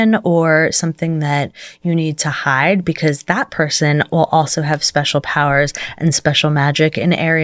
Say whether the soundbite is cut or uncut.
uncut